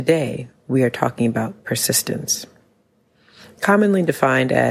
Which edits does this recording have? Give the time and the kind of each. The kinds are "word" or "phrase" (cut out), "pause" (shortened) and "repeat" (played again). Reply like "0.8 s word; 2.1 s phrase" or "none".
none